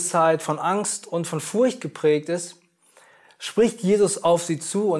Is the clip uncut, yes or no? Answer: yes